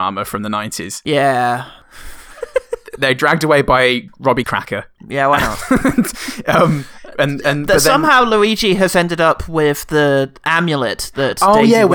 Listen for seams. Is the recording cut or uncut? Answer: cut